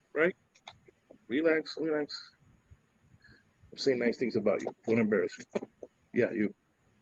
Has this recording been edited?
no; 0 cuts

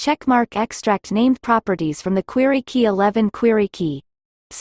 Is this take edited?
no; 0 cuts

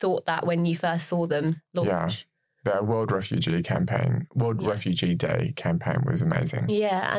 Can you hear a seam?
no; 0 cuts

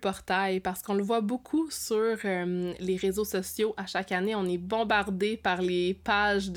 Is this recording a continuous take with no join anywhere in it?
yes; 0 cuts

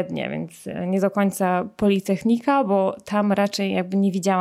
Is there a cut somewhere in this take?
no; 0 cuts

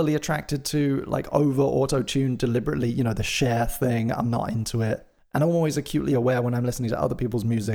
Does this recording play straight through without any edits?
yes; 0 cuts

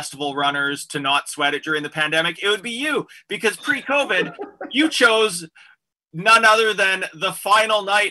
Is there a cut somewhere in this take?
no; 0 cuts

